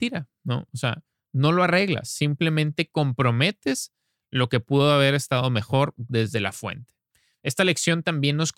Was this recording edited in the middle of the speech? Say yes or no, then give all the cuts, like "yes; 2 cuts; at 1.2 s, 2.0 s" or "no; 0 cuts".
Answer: no; 0 cuts